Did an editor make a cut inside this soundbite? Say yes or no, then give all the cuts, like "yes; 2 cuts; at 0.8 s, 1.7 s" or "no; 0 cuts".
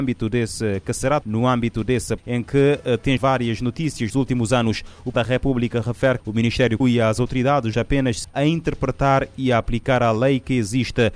yes; 9 cuts; at 1.2 s, 2.2 s, 3.2 s, 4.1 s, 5.1 s, 6.2 s, 6.8 s, 7.7 s, 8.2 s